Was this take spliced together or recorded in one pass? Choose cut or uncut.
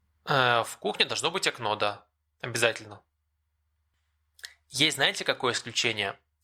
uncut